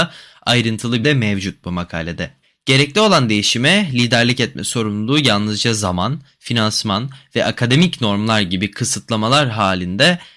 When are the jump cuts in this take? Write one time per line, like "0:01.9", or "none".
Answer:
0:01.0
0:02.4

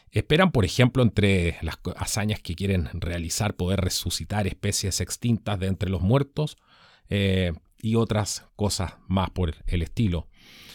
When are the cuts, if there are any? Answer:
none

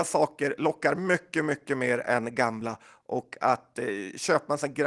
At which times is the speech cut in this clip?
none

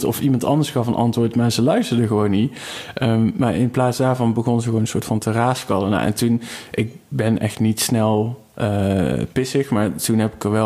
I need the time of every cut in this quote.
none

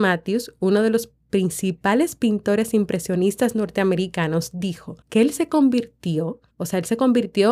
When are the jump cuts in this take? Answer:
0:05.0
0:06.5

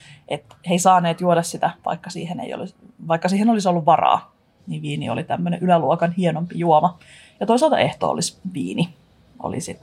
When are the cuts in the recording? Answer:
none

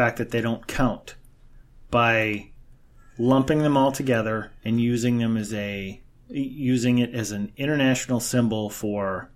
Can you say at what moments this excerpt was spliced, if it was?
none

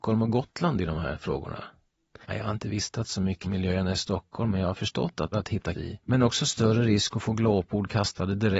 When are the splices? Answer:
0:02.2
0:03.4
0:05.3
0:05.7

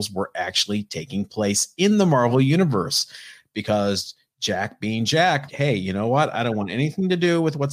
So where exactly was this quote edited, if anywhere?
0:05.5

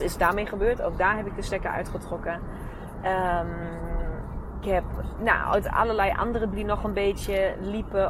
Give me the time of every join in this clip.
0:04.6
0:05.2
0:06.5

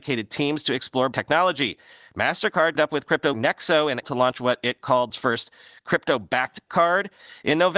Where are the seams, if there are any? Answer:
0:01.1
0:02.7
0:03.3
0:04.0
0:05.1
0:06.7

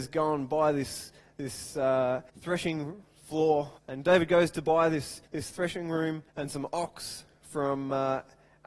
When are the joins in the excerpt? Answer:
0:02.3
0:03.8
0:05.2
0:06.3

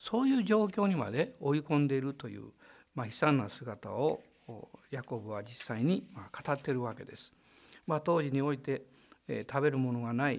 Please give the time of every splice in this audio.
none

